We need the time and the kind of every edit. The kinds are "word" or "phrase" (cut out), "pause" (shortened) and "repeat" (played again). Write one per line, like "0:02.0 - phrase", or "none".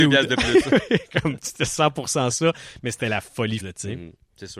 0:03.6 - word